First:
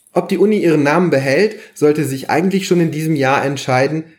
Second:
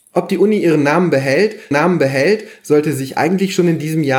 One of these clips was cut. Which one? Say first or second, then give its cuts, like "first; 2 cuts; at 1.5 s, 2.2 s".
second; 1 cut; at 1.7 s